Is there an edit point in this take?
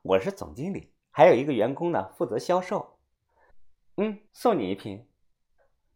yes; 1 cut; at 4.3 s

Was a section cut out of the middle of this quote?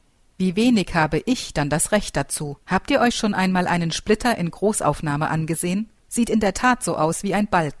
yes; 2 cuts; at 2.6 s, 6.0 s

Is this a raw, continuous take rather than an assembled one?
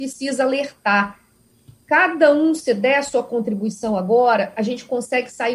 yes; 0 cuts

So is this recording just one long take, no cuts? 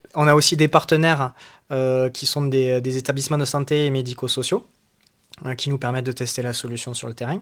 yes; 0 cuts

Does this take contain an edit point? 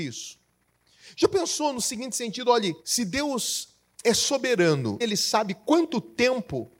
yes; 2 cuts; at 2.8 s, 5.0 s

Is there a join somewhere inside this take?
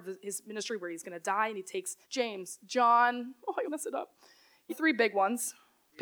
yes; 3 cuts; at 2.0 s, 3.6 s, 4.7 s

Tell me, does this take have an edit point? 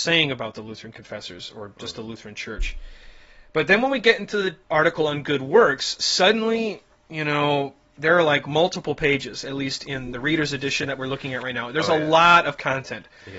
yes; 1 cut; at 4.6 s

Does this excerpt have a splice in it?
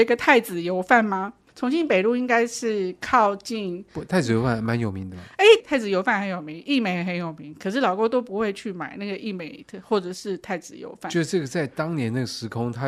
yes; 1 cut; at 5.6 s

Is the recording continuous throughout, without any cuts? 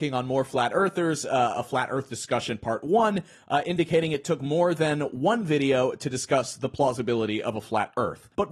yes; 0 cuts

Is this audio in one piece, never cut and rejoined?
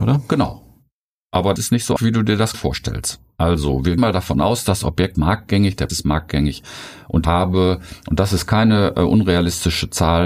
no; 7 cuts; at 1.6 s, 2.0 s, 2.5 s, 4.0 s, 5.1 s, 5.9 s, 7.2 s

